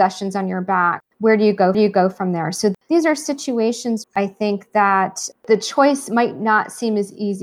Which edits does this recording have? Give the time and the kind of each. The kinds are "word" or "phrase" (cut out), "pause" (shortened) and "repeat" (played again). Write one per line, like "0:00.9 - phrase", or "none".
0:01.7 - repeat
0:04.0 - word